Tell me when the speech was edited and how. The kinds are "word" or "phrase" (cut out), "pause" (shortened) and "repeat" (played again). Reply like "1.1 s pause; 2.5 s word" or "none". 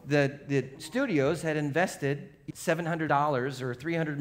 2.5 s word; 3.1 s word